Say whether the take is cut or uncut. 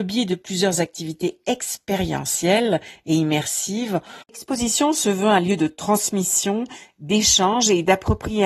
cut